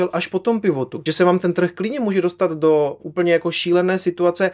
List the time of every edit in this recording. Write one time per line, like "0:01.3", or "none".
0:01.1